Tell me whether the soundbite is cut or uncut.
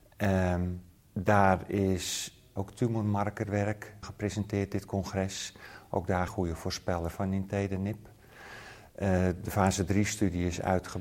cut